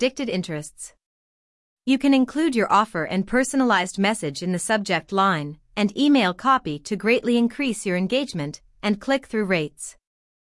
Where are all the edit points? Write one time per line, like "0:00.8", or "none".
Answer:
none